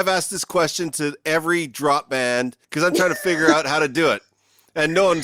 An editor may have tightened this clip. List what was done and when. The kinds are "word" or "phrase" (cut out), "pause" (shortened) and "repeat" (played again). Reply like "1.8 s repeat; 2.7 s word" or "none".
2.6 s pause